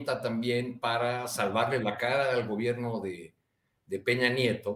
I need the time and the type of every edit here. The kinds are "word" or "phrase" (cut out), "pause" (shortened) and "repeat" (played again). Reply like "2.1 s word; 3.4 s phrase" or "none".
none